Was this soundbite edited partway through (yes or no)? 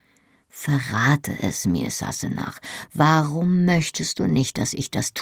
no